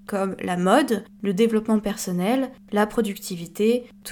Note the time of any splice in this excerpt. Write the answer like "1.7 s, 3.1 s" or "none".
none